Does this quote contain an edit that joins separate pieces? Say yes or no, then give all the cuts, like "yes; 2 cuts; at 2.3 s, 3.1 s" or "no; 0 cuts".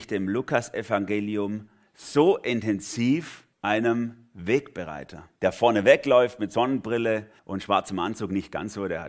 yes; 3 cuts; at 3.5 s, 5.4 s, 7.4 s